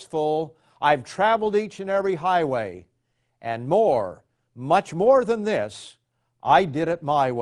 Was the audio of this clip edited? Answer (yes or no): no